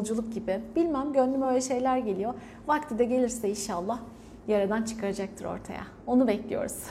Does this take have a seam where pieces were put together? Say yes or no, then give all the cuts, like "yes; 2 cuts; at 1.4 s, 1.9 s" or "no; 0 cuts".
no; 0 cuts